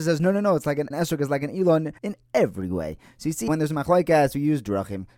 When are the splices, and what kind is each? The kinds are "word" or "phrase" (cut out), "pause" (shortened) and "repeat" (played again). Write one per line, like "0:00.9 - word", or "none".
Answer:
0:00.9 - word
0:02.0 - pause
0:03.5 - word